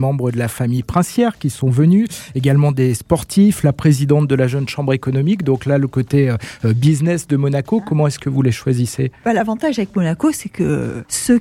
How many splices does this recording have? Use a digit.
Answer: 0